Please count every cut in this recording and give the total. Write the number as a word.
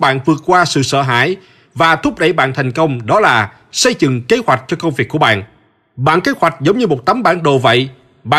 zero